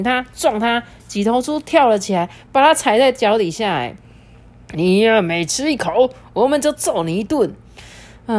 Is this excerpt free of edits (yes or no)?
no